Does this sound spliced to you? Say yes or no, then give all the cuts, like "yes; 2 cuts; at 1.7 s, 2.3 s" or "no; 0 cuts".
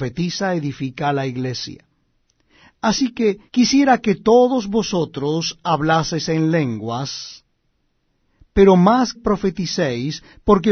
yes; 2 cuts; at 3.5 s, 9.1 s